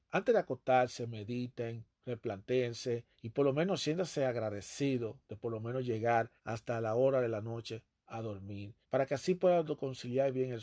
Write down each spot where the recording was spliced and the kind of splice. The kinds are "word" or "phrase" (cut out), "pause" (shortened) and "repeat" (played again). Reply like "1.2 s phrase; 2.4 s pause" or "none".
3.1 s pause; 6.4 s pause; 8.8 s pause